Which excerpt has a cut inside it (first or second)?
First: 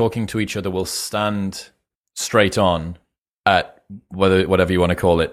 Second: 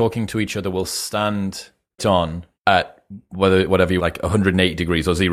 second